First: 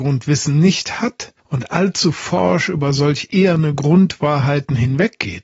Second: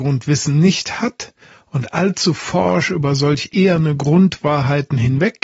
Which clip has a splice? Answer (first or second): first